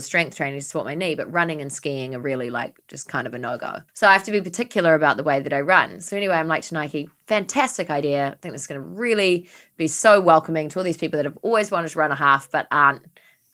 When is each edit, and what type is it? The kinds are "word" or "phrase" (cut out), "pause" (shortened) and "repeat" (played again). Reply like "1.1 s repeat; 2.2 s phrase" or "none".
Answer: 3.9 s pause